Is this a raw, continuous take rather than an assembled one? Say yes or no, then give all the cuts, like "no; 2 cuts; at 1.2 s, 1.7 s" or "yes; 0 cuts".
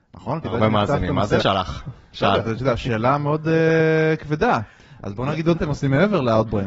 no; 3 cuts; at 1.4 s, 2.4 s, 5.5 s